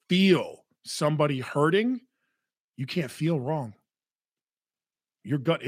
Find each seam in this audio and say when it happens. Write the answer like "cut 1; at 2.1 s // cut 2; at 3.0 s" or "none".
none